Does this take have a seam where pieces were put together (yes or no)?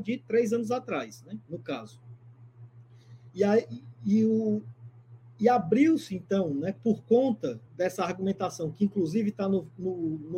yes